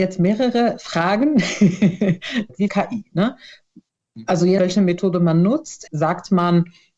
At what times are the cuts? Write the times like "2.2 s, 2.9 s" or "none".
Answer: 2.7 s, 4.6 s, 5.9 s